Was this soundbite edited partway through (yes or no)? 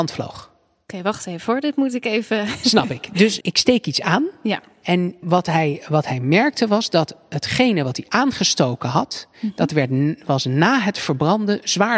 yes